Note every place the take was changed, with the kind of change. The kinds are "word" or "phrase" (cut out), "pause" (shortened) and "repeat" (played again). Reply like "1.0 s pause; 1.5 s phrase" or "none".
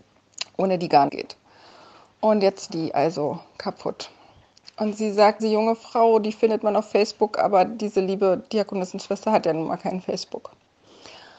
1.1 s word; 2.7 s word; 5.4 s word